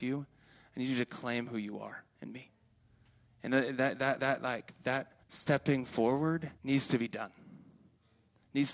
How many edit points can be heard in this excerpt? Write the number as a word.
three